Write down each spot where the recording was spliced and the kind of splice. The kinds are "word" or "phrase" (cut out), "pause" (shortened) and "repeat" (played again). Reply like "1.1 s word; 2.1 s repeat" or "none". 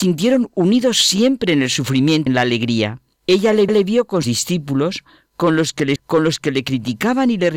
2.3 s word; 3.1 s pause; 3.7 s repeat; 4.2 s word; 6.0 s word